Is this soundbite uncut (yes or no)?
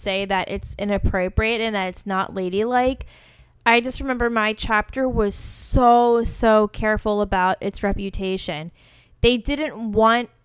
yes